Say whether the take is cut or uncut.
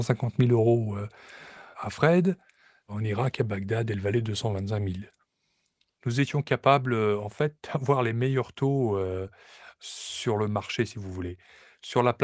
uncut